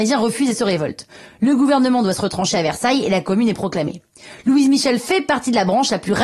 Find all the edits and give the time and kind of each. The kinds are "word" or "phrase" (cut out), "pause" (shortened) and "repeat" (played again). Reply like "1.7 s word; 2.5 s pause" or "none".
none